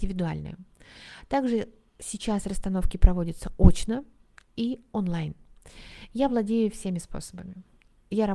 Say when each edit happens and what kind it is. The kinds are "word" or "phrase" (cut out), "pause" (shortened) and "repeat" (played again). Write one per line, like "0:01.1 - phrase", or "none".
none